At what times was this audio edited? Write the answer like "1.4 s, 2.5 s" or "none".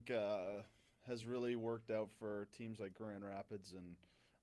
none